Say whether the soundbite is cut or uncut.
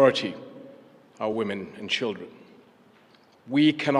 uncut